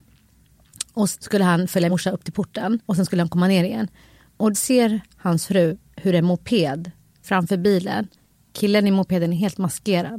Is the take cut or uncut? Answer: cut